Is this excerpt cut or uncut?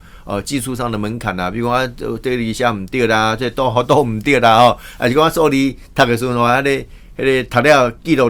uncut